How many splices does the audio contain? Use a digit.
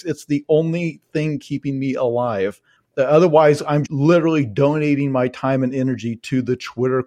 2